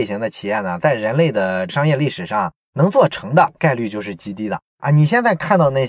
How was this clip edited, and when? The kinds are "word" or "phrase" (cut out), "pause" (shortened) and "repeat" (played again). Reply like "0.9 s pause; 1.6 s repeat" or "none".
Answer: 4.7 s pause